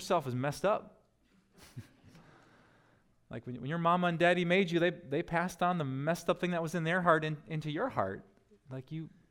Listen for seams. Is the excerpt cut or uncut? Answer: uncut